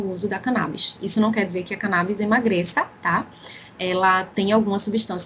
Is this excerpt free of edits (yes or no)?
yes